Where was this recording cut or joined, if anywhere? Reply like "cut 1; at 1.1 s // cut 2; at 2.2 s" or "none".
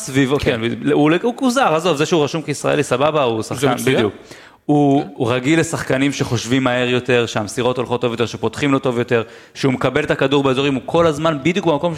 none